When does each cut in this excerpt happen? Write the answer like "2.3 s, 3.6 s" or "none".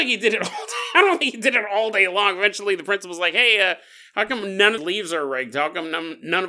4.8 s